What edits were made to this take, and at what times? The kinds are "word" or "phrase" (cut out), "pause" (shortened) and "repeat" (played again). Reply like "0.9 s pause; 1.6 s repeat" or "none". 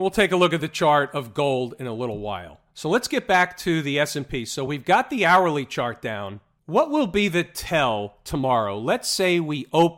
none